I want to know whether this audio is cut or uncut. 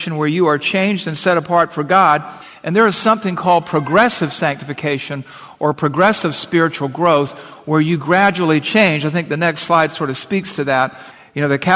uncut